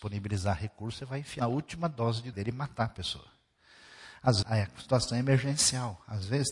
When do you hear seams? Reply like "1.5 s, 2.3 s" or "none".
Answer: 1.4 s, 2.3 s, 4.4 s